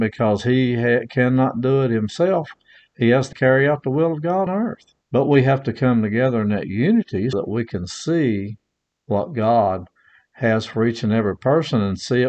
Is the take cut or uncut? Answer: cut